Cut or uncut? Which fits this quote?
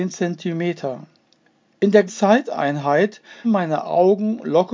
cut